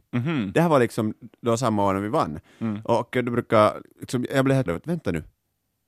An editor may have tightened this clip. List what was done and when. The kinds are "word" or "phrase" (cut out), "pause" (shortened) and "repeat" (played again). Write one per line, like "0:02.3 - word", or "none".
0:04.7 - word